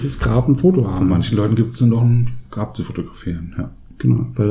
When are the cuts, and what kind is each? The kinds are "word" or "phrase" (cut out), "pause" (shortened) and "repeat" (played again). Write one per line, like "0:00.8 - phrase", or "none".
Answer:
none